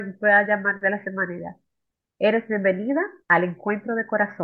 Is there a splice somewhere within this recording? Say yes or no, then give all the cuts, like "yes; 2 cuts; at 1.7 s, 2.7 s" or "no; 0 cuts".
yes; 2 cuts; at 1.0 s, 3.2 s